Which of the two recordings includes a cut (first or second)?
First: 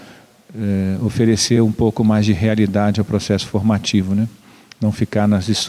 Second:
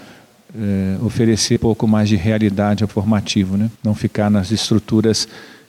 second